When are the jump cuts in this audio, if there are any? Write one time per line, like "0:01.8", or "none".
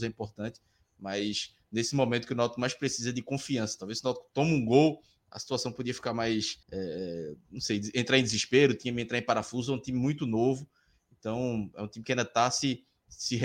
0:06.6